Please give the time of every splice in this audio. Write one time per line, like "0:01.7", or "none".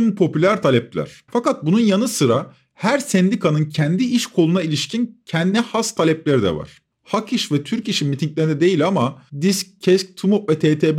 0:01.3
0:06.9
0:09.3

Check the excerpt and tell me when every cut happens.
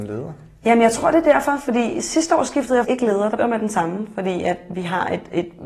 0:02.8
0:03.4

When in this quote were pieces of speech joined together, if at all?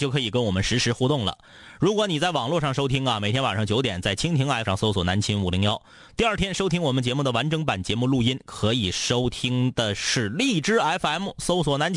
0:04.7

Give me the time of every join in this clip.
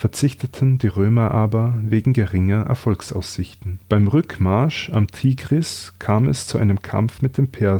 0:03.8

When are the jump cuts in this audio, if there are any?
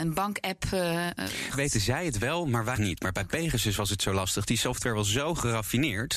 0:01.5
0:02.8

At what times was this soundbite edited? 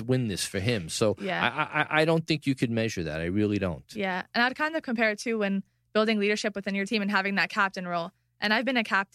none

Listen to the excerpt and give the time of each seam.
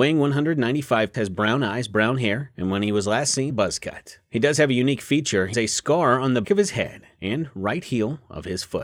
0:01.1
0:03.5
0:05.5
0:06.4

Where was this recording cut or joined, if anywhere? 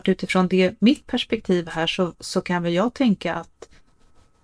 0:02.1

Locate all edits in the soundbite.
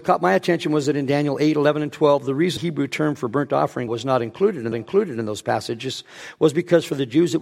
0:02.6
0:03.9
0:04.7

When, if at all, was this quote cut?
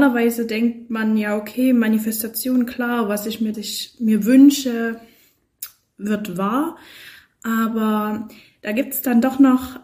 0:03.5

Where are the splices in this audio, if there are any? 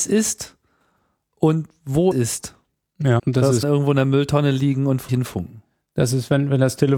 0:02.1
0:03.2
0:03.6
0:05.1

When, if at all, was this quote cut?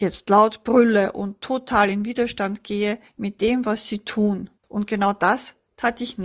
0:03.1
0:04.6

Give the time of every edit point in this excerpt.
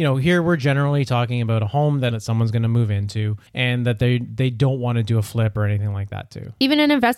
0:02.1
0:03.5

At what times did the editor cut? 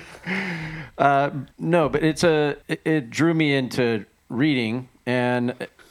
0:01.5
0:02.6

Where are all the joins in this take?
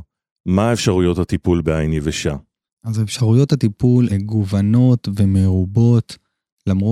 0:04.1

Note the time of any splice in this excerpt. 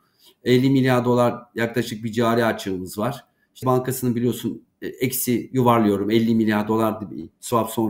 0:03.6

